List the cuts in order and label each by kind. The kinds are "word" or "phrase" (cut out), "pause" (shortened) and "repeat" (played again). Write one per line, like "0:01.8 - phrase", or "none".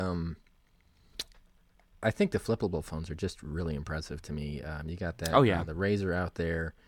none